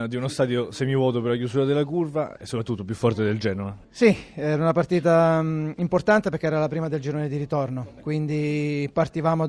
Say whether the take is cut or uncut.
uncut